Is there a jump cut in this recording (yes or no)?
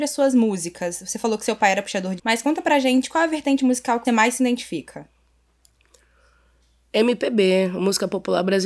yes